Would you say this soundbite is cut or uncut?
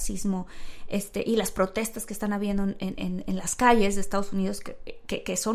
uncut